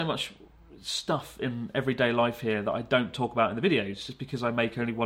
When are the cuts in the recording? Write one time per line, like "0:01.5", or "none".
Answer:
none

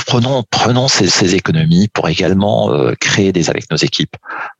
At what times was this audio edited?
0:01.1
0:03.5

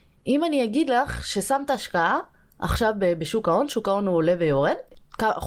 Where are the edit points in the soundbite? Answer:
none

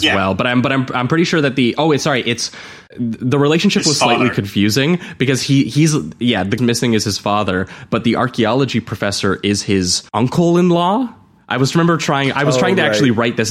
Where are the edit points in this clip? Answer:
0:02.9
0:06.6
0:10.1

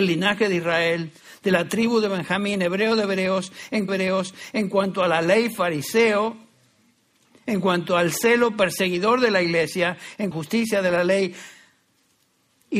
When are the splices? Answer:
0:03.9
0:10.3

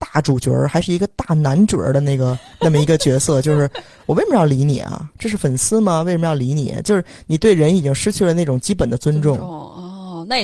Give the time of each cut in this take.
none

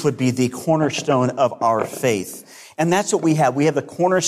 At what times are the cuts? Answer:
none

